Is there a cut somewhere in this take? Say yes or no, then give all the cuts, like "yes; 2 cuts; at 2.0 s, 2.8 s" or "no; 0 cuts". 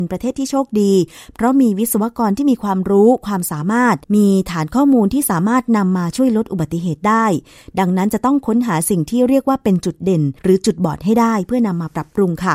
yes; 2 cuts; at 4.0 s, 10.4 s